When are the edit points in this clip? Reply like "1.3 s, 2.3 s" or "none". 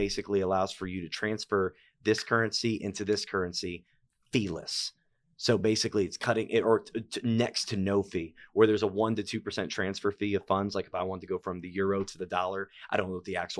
none